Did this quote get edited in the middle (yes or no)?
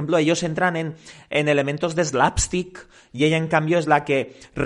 no